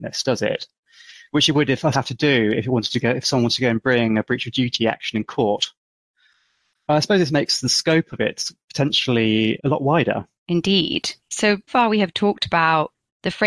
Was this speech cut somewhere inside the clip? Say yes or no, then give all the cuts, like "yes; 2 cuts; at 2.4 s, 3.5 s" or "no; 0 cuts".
yes; 3 cuts; at 1.9 s, 9.6 s, 11.7 s